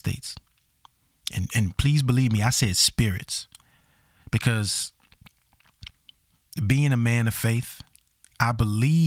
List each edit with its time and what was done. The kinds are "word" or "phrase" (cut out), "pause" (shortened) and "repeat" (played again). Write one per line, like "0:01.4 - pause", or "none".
none

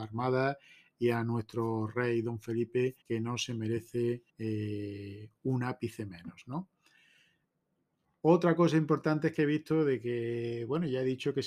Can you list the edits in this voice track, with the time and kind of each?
0:03.0 - pause
0:04.3 - pause

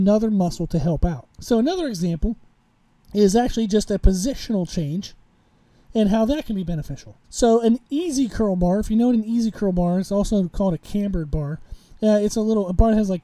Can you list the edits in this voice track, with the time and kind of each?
0:01.3 - pause
0:07.2 - pause

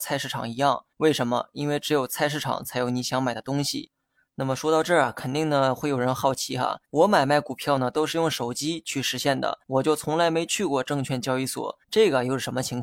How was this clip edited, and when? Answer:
0:00.9 - pause
0:06.8 - pause
0:09.6 - pause
0:11.8 - pause

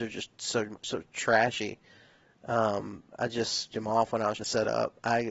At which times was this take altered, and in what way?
0:03.7 - word
0:04.4 - word

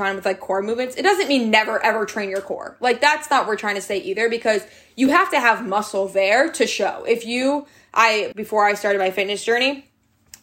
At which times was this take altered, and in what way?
0:08.3 - word

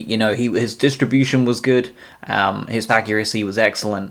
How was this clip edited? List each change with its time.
0:02.9 - word

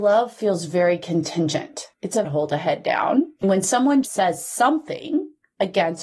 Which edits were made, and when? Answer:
0:01.9 - pause
0:02.2 - phrase
0:04.0 - word

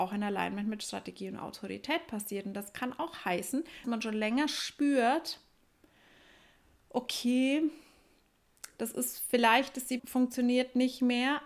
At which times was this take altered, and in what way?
0:03.8 - word
0:10.0 - word

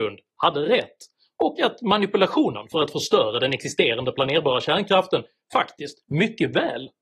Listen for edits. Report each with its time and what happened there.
none

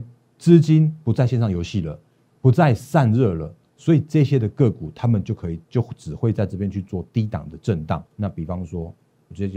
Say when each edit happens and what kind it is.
0:08.1 - pause

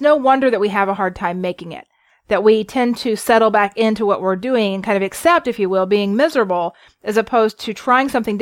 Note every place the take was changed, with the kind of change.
none

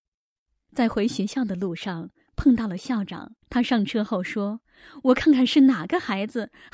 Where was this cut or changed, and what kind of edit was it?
0:03.4 - pause

